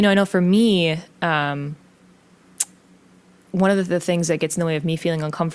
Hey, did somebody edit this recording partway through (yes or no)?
no